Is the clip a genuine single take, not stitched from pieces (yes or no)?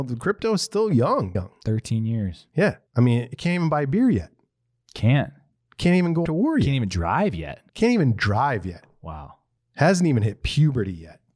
no